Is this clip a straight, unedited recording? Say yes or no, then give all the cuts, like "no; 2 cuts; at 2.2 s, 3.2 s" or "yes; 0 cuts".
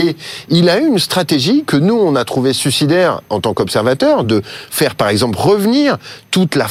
yes; 0 cuts